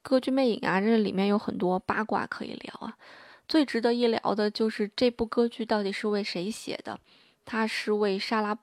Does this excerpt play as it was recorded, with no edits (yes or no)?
yes